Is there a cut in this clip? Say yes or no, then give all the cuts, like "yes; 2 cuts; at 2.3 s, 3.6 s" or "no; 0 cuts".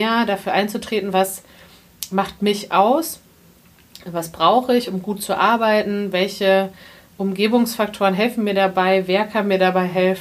no; 0 cuts